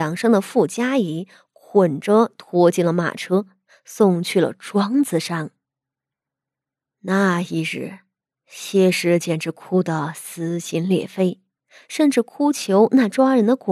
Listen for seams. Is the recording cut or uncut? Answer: uncut